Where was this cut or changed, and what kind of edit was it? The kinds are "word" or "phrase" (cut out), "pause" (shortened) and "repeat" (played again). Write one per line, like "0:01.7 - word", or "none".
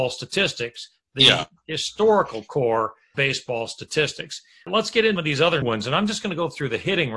0:03.1 - word
0:05.2 - word
0:05.6 - word